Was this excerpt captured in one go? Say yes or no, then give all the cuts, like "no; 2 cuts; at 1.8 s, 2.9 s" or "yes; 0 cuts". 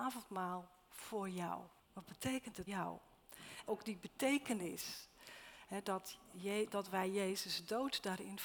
no; 3 cuts; at 1.8 s, 2.7 s, 3.7 s